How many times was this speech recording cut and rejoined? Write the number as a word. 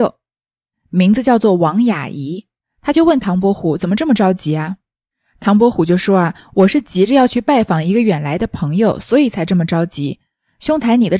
zero